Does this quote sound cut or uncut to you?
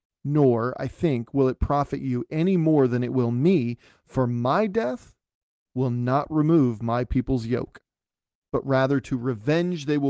uncut